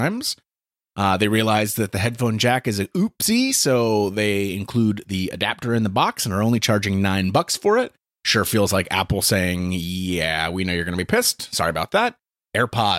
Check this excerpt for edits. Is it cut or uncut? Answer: uncut